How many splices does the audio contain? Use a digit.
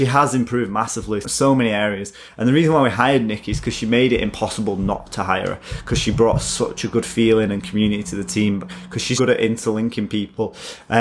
2